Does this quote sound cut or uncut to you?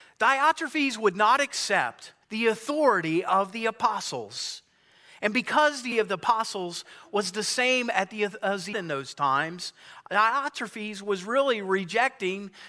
cut